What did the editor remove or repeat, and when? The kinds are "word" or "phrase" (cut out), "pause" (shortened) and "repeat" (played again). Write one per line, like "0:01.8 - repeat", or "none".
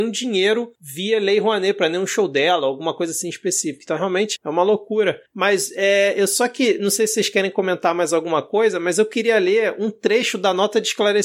0:04.4 - word